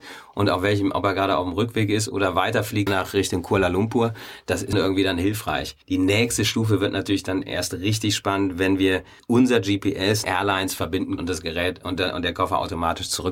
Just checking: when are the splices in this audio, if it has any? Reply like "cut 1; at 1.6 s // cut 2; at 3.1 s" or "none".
cut 1; at 2.9 s // cut 2; at 4.7 s // cut 3; at 5.8 s // cut 4; at 9.2 s // cut 5; at 10.2 s // cut 6; at 11.2 s